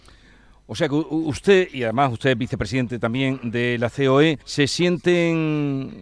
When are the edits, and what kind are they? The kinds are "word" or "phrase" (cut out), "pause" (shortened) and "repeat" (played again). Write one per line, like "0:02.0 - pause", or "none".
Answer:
0:04.4 - pause